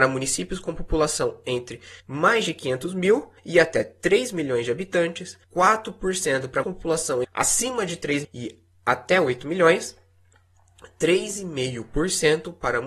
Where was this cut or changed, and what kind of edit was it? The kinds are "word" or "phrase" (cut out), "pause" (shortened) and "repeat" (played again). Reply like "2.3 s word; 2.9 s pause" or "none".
2.0 s pause; 3.4 s pause; 5.4 s pause; 6.6 s word; 7.2 s word; 8.2 s word